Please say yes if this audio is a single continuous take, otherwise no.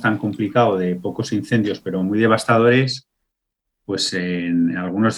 yes